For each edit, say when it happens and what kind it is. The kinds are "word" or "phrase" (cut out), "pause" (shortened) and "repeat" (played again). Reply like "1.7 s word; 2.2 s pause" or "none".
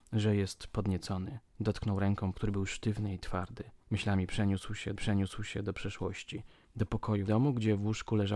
1.5 s pause; 2.3 s word; 3.8 s pause; 5.0 s repeat; 6.6 s pause; 7.3 s word